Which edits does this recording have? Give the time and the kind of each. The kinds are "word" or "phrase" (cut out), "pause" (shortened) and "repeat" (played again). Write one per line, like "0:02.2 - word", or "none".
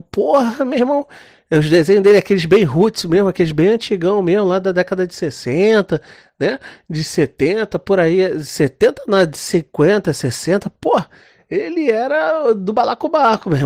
none